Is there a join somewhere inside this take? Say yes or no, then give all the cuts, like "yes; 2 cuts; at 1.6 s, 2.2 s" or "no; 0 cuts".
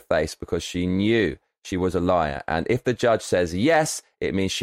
no; 0 cuts